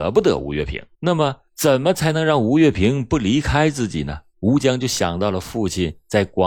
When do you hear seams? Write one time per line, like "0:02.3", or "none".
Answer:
0:00.9
0:01.5
0:04.3